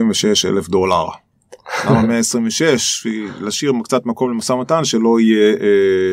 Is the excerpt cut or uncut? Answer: uncut